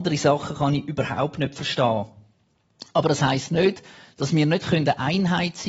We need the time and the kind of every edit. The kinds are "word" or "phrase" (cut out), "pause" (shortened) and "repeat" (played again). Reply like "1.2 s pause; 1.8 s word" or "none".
none

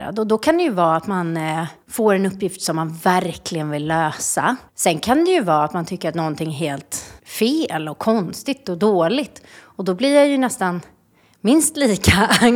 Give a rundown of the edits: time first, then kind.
1.8 s pause; 4.7 s pause; 7.2 s pause

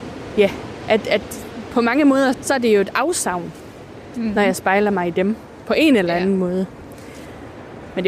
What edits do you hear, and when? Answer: 2.3 s word

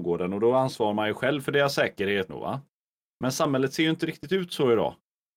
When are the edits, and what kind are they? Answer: 2.3 s phrase

